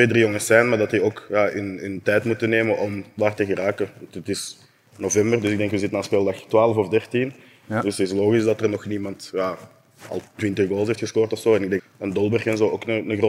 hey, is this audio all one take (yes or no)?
no